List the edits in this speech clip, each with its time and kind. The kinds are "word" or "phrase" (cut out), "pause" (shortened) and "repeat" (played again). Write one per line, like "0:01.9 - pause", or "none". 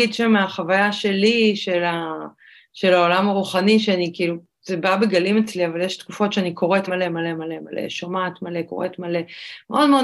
0:06.9 - word